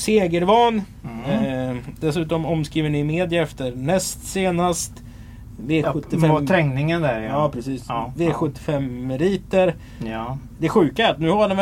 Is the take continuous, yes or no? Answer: yes